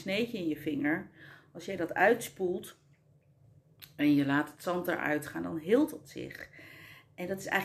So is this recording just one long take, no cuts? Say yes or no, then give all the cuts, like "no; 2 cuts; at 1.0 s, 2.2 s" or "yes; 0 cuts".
yes; 0 cuts